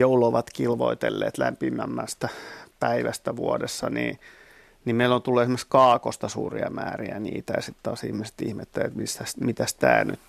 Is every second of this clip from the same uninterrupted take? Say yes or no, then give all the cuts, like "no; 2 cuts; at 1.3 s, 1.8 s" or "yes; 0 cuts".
yes; 0 cuts